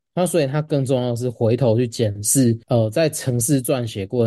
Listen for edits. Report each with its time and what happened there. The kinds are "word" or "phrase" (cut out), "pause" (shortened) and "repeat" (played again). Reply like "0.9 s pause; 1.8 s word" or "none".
2.6 s pause